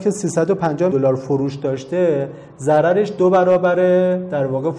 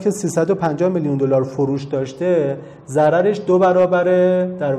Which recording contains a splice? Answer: first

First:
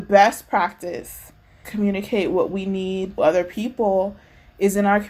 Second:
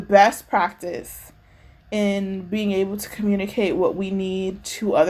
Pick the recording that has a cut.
first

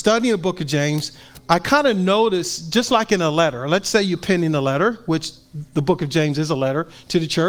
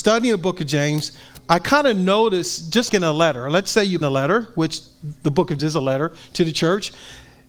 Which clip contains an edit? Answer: second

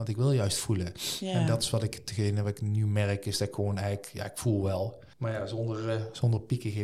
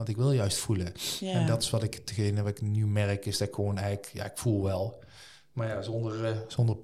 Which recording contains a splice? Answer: first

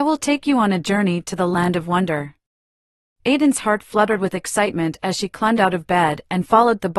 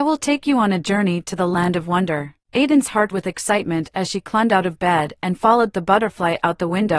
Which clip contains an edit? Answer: second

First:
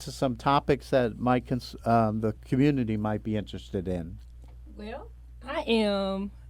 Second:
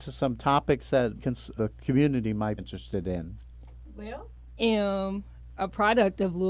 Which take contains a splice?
second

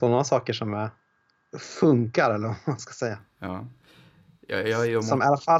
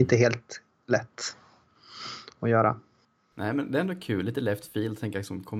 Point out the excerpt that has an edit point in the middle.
first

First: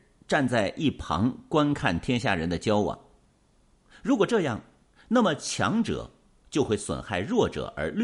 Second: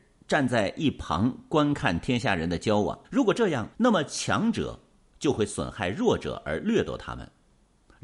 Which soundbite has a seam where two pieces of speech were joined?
second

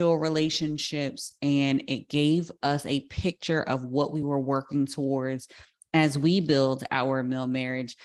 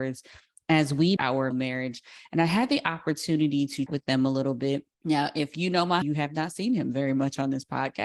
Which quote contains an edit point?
second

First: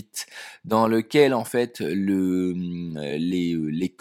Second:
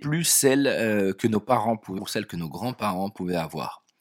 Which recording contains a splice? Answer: second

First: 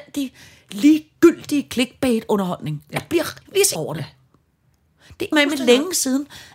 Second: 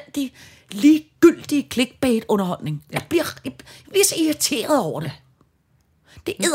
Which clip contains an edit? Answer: first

